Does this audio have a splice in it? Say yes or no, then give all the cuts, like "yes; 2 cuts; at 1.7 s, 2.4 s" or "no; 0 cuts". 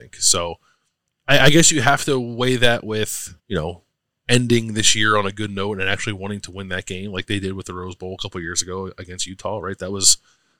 yes; 1 cut; at 3.4 s